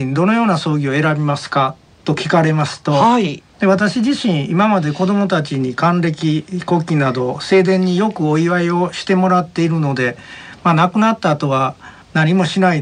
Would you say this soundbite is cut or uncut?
cut